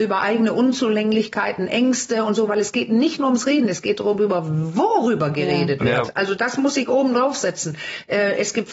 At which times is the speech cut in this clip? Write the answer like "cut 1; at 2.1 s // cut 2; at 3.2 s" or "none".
none